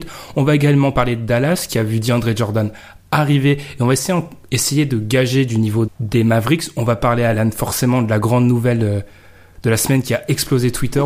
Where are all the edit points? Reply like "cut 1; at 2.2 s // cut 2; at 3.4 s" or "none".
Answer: cut 1; at 5.9 s